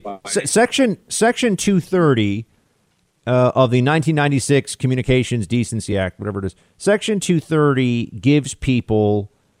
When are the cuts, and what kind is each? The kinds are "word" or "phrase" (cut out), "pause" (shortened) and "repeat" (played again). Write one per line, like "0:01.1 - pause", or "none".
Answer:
none